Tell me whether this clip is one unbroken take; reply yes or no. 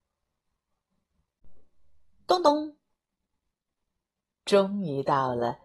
yes